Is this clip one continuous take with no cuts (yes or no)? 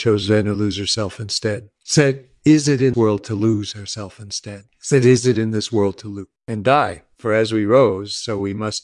no